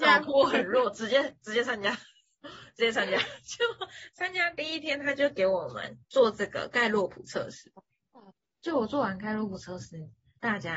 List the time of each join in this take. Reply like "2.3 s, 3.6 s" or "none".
6.0 s, 8.3 s